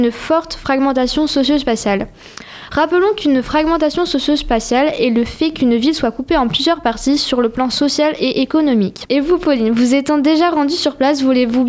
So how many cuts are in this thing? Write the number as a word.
zero